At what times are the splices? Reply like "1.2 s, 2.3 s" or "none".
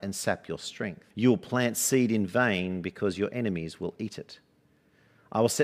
1.1 s